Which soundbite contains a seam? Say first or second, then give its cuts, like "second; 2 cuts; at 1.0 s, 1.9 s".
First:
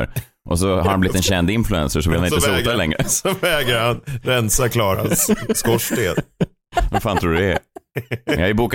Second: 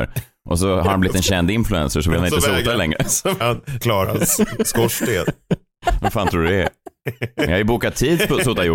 second; 2 cuts; at 3.4 s, 3.8 s